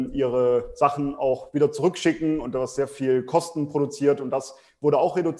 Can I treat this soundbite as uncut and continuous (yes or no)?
yes